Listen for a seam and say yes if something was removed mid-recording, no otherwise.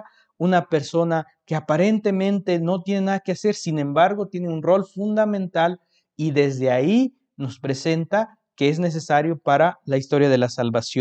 no